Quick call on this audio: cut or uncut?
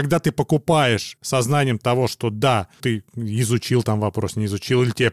cut